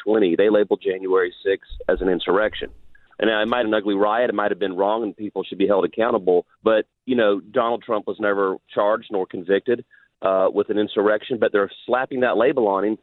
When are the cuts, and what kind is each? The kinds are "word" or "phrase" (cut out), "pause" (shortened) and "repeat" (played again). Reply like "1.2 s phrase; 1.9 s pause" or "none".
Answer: 3.6 s phrase; 6.5 s pause